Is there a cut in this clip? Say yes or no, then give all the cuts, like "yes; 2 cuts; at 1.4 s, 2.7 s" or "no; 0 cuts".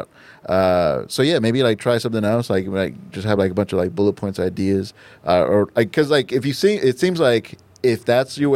no; 0 cuts